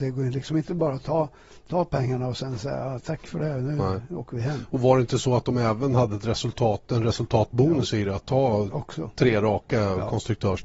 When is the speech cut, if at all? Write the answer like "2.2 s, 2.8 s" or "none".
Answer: none